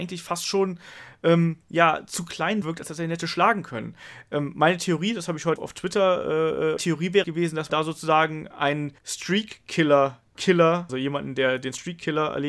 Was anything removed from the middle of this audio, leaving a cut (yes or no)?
yes